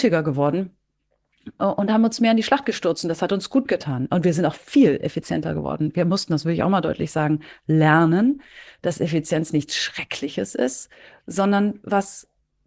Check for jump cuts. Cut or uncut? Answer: uncut